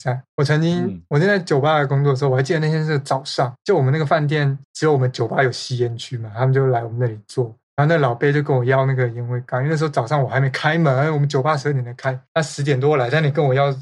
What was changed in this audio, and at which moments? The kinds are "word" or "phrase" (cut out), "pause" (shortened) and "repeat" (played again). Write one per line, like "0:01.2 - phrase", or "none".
0:04.6 - pause
0:07.7 - pause